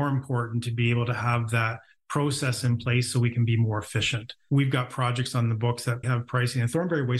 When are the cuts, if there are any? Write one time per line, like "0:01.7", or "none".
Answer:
0:06.0